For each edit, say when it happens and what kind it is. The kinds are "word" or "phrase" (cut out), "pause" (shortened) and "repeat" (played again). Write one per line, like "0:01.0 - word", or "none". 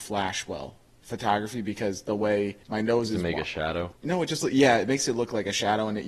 0:02.6 - pause
0:04.0 - pause

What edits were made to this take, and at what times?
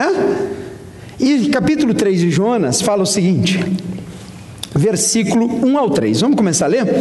none

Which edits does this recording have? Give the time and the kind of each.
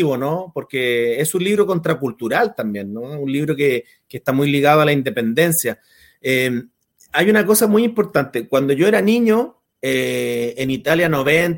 none

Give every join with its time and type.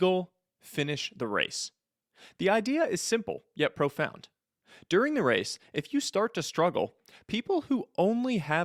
none

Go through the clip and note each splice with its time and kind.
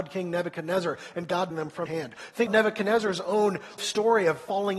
0:01.5 - word
0:01.9 - word
0:02.5 - word
0:03.8 - word

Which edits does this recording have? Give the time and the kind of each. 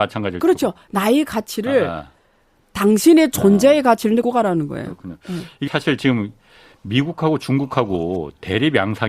0:04.2 - word
0:05.7 - word

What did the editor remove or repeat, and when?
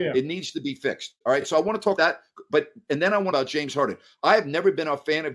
0:01.2 - pause
0:02.0 - word
0:03.3 - phrase

